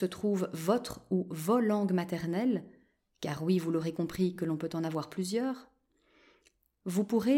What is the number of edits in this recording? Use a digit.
0